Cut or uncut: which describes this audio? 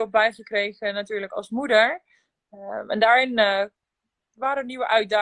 uncut